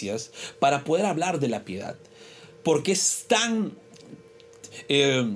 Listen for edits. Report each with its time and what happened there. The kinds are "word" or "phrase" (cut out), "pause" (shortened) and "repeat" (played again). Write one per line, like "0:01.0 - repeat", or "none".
none

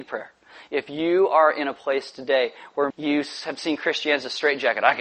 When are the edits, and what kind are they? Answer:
0:02.9 - word

